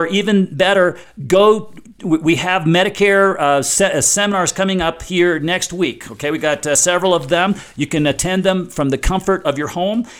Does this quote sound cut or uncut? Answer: uncut